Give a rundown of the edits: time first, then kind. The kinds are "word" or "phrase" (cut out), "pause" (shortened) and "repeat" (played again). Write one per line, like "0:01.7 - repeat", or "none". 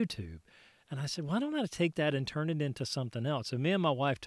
none